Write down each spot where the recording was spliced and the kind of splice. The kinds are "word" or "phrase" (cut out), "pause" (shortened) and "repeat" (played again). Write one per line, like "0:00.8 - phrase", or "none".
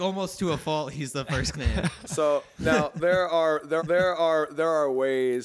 0:01.5 - word
0:03.8 - repeat